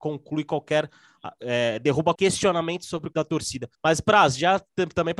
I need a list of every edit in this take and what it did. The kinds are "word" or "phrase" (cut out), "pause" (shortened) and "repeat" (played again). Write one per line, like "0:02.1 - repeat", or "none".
0:02.1 - word
0:03.1 - word
0:03.7 - pause